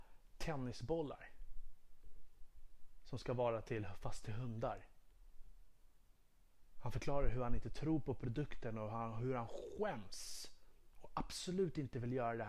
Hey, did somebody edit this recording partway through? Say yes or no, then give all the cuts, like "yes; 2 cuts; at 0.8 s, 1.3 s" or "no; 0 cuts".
no; 0 cuts